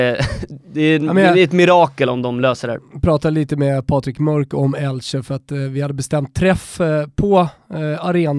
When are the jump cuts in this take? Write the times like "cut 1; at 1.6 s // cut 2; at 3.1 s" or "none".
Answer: none